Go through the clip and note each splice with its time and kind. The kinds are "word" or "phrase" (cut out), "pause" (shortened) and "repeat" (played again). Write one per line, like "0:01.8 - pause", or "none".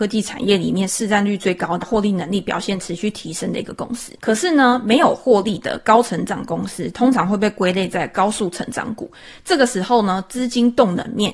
0:01.8 - word
0:04.2 - pause